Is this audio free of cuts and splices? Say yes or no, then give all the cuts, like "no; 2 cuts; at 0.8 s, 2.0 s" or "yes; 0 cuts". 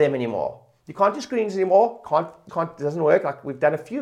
no; 1 cut; at 2.5 s